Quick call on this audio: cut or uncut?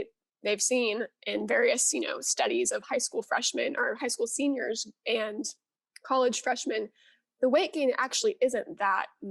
uncut